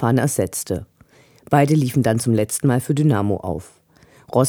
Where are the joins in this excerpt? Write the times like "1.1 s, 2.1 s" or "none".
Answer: none